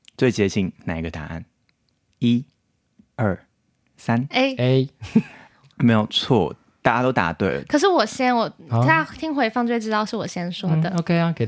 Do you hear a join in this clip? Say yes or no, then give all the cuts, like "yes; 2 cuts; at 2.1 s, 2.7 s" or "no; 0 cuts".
no; 0 cuts